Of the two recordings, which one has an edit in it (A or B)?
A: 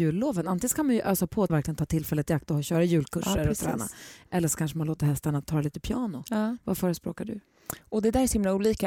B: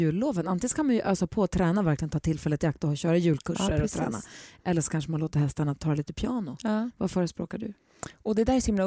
A